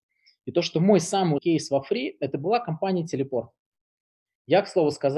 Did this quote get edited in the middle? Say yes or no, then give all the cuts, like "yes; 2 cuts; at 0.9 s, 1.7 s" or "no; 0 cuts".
yes; 1 cut; at 1.4 s